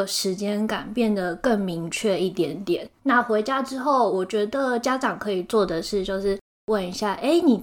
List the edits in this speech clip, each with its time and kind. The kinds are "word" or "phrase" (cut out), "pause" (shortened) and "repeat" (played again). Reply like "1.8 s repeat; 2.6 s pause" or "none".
2.9 s pause